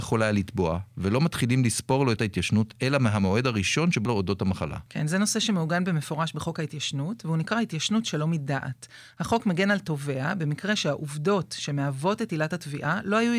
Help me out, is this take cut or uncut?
cut